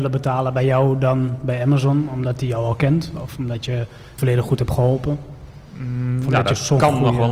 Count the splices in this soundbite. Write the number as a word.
one